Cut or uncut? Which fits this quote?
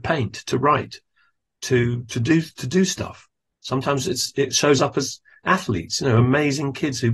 uncut